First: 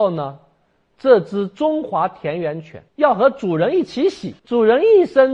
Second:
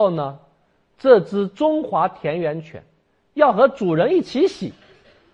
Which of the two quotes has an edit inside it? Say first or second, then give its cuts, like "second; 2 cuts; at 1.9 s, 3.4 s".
first; 2 cuts; at 2.9 s, 4.4 s